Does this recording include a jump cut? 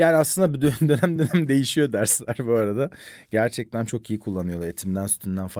no; 0 cuts

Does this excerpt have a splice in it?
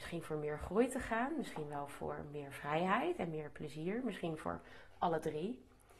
no; 0 cuts

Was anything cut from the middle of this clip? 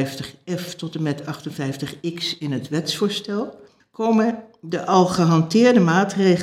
yes; 1 cut; at 3.8 s

